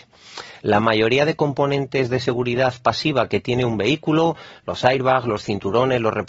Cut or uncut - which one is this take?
uncut